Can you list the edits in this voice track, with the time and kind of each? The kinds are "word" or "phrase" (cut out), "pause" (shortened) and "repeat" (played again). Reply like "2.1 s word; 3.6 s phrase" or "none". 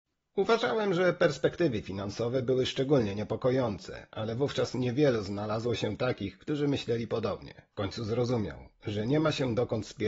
7.7 s pause